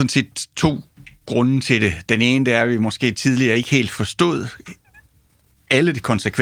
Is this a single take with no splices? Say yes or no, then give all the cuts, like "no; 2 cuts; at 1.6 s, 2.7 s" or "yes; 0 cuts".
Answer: yes; 0 cuts